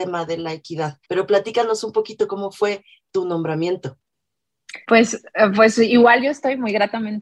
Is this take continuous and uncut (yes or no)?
no